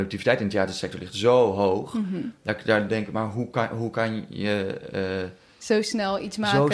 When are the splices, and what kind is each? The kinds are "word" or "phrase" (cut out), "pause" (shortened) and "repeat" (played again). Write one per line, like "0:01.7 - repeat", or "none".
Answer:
none